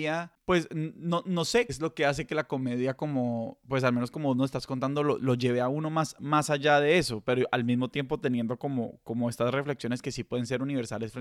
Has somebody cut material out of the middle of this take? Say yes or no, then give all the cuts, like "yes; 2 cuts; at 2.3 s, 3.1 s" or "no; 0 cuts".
yes; 1 cut; at 1.7 s